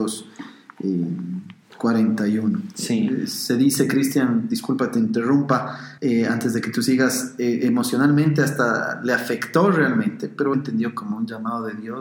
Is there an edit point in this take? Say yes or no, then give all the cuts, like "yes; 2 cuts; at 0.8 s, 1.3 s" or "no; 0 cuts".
yes; 2 cuts; at 6.0 s, 10.5 s